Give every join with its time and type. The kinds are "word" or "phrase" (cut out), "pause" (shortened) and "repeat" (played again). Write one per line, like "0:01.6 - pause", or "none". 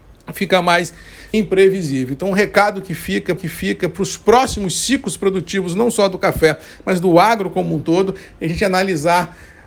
0:01.3 - phrase
0:03.4 - repeat